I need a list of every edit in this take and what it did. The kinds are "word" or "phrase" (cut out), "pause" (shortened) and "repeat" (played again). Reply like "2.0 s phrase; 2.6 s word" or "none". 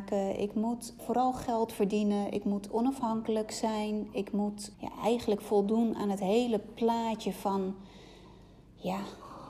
1.0 s word; 4.7 s word